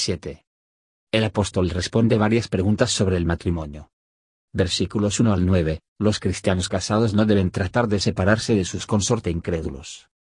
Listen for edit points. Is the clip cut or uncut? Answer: uncut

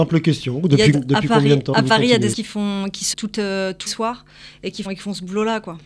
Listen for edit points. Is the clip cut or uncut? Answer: cut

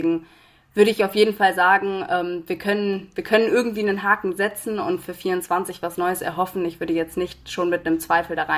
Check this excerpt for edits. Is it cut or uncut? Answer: uncut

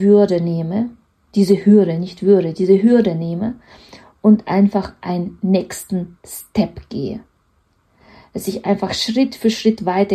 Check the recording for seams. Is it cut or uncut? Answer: uncut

